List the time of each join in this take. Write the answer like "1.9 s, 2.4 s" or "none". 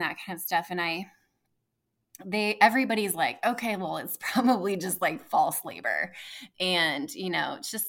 none